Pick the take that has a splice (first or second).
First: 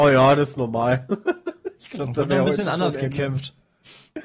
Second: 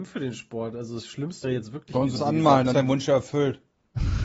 second